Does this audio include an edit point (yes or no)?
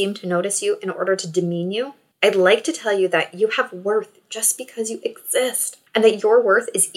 yes